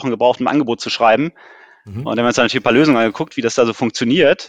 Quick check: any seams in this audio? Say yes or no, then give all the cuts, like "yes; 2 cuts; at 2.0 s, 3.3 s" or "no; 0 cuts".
no; 0 cuts